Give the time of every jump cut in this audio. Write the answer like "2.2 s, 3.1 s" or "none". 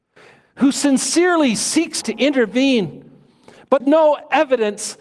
2.0 s, 3.8 s